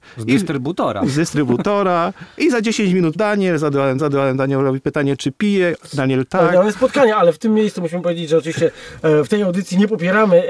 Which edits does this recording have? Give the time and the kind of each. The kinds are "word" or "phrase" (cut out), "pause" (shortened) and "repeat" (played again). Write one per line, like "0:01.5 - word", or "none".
0:03.2 - word
0:04.0 - repeat